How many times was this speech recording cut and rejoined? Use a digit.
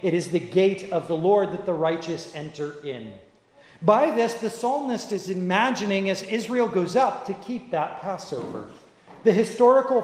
0